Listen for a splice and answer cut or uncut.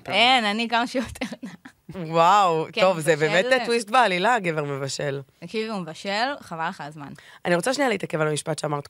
uncut